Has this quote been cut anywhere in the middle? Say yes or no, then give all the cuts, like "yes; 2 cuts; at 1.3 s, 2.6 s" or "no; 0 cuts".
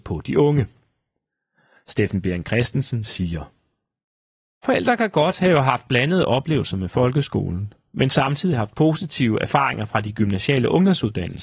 no; 0 cuts